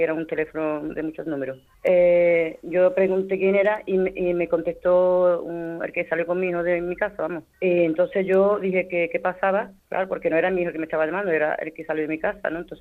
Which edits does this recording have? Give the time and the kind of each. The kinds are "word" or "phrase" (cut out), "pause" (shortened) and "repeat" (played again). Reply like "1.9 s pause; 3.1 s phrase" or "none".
1.7 s pause; 7.5 s pause; 9.8 s pause

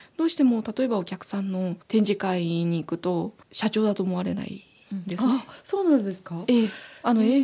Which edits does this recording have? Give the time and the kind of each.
1.8 s pause; 3.4 s pause

